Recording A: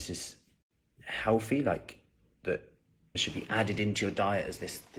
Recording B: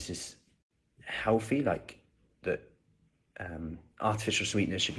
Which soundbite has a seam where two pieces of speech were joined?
A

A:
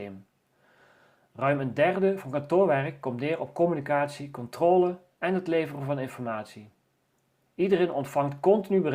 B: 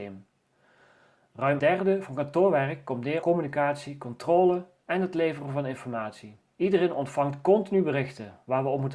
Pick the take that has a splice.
B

